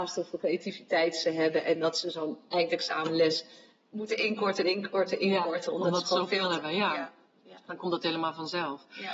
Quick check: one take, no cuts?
yes; 0 cuts

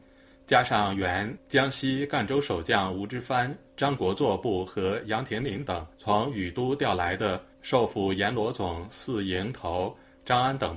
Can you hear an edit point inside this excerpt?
yes; 3 cuts; at 3.7 s, 5.9 s, 7.5 s

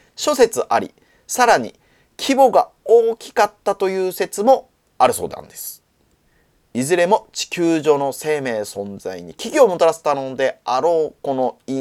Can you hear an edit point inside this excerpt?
no; 0 cuts

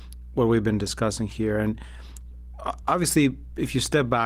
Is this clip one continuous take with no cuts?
yes; 0 cuts

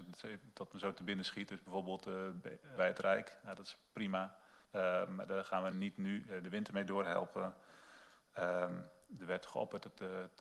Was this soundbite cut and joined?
yes; 3 cuts; at 2.8 s, 4.6 s, 5.7 s

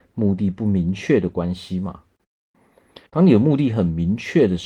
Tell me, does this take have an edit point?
yes; 1 cut; at 3.1 s

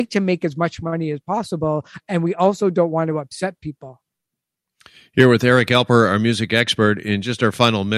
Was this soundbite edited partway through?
no; 0 cuts

